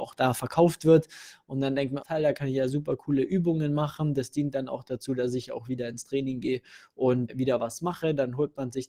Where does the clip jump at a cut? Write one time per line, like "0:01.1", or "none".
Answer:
0:02.0
0:07.3